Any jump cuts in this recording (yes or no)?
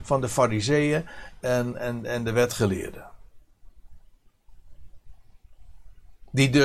no